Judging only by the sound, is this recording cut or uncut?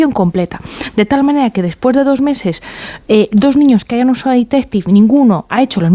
uncut